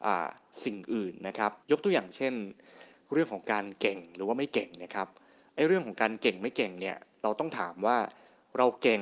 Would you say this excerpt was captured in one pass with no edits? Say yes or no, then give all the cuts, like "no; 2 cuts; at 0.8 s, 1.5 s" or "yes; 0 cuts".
no; 1 cut; at 1.6 s